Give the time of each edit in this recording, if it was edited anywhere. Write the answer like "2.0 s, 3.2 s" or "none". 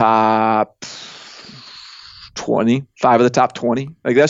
none